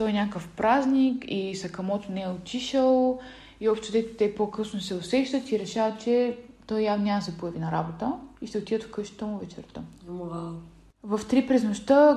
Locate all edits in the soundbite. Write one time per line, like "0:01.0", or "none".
0:08.3